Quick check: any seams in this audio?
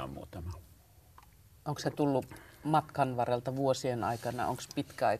no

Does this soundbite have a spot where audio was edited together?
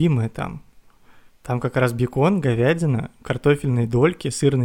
yes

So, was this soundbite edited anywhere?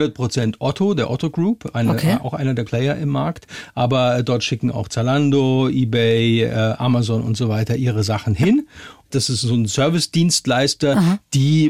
yes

